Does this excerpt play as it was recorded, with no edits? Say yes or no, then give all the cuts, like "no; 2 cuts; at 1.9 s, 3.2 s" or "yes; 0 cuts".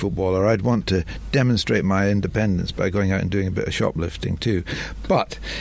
yes; 0 cuts